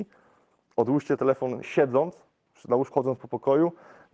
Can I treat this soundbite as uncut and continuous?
no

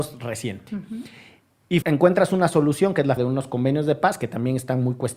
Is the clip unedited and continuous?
no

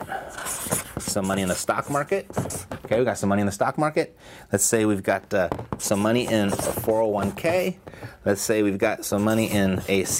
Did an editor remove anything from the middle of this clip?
no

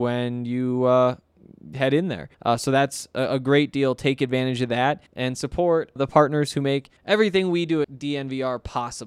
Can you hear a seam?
yes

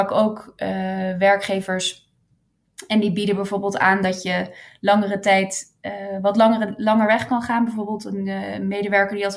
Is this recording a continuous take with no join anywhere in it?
yes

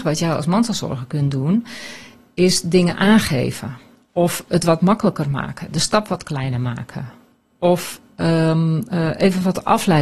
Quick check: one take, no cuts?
yes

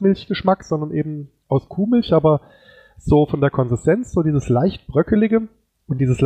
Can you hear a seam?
no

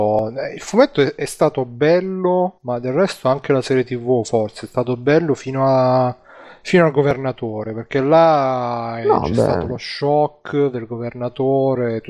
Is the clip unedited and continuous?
yes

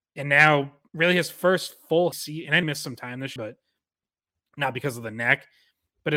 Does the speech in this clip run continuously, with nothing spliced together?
no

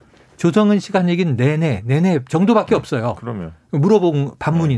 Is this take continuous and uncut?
yes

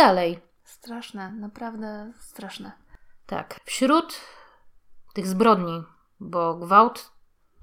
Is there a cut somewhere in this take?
no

